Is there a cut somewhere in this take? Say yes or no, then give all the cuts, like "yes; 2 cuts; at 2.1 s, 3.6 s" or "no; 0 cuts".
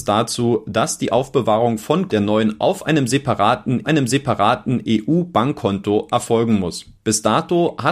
yes; 3 cuts; at 2.1 s, 2.6 s, 3.8 s